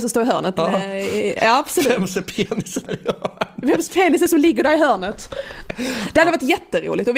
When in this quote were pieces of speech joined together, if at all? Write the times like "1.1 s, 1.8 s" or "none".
2.9 s